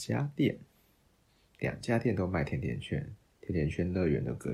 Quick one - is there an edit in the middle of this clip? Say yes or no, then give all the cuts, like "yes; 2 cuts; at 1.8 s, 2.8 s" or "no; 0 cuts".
yes; 1 cut; at 3.2 s